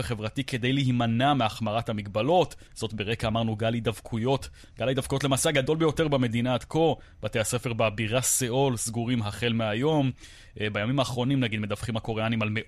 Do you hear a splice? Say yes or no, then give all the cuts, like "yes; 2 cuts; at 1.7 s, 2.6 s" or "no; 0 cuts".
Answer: yes; 1 cut; at 2.7 s